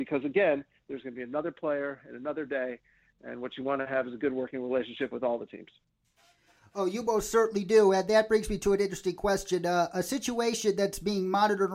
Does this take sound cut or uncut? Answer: uncut